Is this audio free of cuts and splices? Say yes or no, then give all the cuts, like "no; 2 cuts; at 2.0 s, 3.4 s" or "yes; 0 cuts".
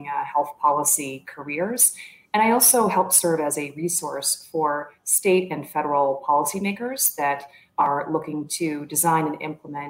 yes; 0 cuts